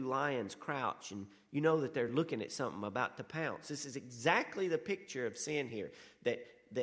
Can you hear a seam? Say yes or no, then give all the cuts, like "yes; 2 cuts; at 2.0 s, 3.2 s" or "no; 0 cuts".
no; 0 cuts